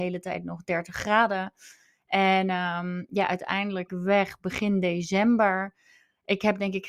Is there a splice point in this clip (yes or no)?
yes